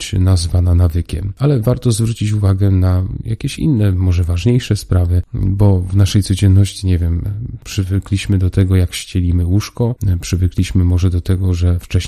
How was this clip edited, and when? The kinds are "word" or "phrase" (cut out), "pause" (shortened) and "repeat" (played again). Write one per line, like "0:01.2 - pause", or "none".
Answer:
none